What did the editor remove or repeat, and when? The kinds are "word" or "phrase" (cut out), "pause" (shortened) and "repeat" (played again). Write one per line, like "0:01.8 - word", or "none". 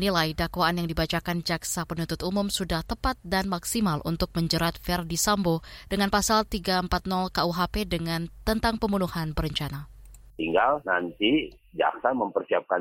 none